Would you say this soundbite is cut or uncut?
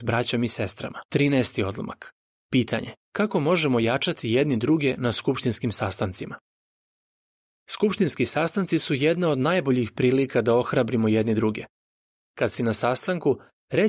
cut